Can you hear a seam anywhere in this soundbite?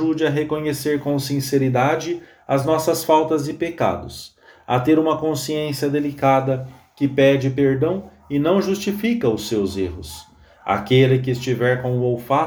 no; 0 cuts

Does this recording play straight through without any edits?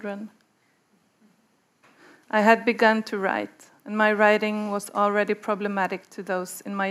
yes; 0 cuts

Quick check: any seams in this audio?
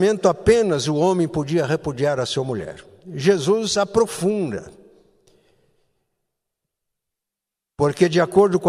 no; 0 cuts

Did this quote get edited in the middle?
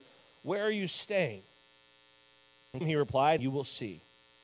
yes; 2 cuts; at 2.8 s, 3.4 s

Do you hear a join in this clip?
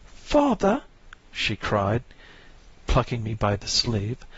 no; 0 cuts

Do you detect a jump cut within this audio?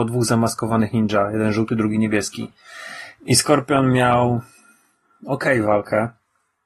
no; 0 cuts

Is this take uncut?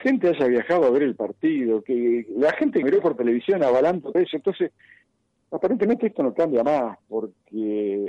no; 2 cuts; at 2.8 s, 4.1 s

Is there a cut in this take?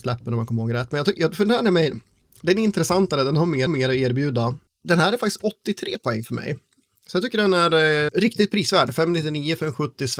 yes; 2 cuts; at 3.7 s, 8.1 s

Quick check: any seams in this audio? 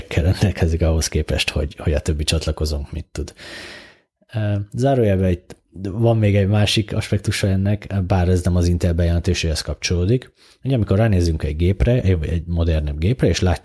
no; 0 cuts

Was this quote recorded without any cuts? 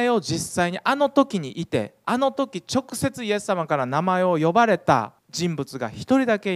no; 1 cut; at 5.2 s

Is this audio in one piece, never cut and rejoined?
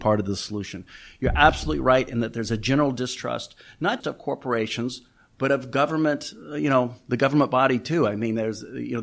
no; 1 cut; at 4.0 s

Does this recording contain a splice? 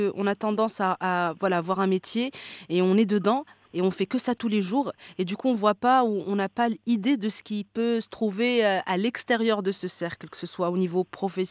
no; 0 cuts

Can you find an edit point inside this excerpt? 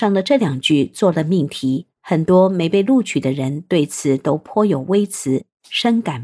yes; 1 cut; at 2.0 s

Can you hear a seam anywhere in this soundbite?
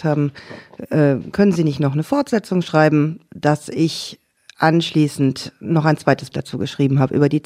yes; 1 cut; at 6.3 s

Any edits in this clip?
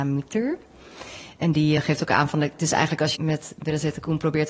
yes; 2 cuts; at 1.8 s, 3.1 s

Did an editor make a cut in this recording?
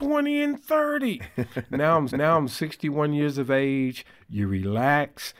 yes; 1 cut; at 2.1 s

